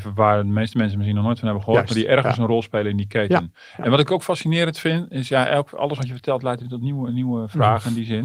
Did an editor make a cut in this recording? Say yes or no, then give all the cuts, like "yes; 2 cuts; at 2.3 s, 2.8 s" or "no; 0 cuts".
no; 0 cuts